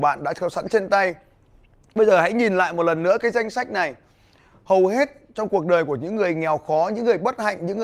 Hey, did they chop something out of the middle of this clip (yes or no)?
no